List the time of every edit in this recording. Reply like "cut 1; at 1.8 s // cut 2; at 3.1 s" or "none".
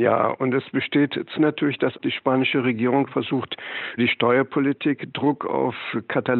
cut 1; at 1.3 s // cut 2; at 3.1 s // cut 3; at 4.0 s